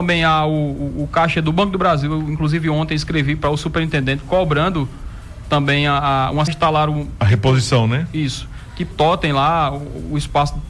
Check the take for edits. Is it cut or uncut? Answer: cut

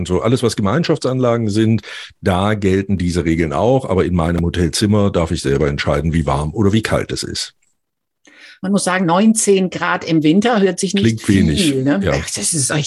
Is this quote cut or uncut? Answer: uncut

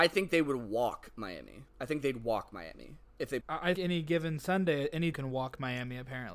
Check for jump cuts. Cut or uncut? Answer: cut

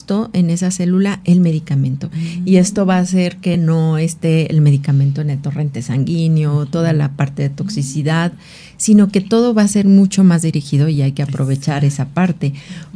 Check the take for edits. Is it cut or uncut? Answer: uncut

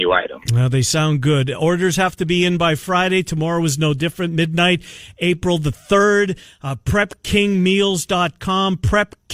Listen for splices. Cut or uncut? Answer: uncut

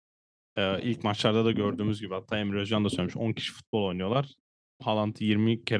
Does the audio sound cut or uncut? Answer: uncut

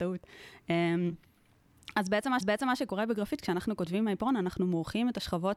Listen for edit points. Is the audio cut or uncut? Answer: cut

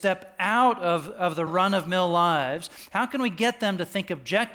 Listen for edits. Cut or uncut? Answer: cut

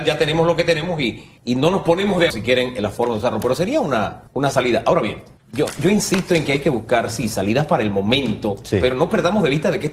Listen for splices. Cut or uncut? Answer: cut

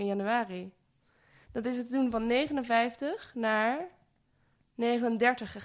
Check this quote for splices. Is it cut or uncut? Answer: uncut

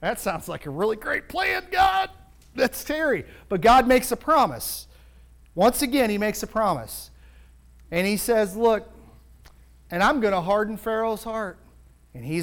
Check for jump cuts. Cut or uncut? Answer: uncut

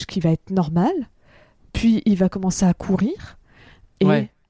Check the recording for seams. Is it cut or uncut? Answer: uncut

